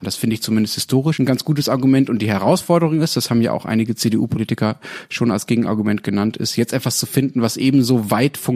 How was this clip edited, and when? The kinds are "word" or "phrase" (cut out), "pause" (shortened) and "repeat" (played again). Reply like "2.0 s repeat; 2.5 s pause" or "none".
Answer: none